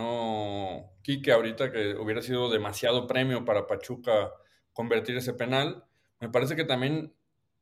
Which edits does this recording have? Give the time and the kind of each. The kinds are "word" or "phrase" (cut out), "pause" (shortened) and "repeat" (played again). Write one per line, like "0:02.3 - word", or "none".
none